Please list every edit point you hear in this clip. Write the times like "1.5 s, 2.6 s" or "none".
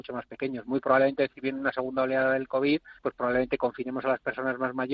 3.0 s